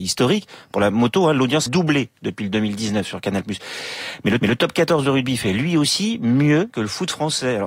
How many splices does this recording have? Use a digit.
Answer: 3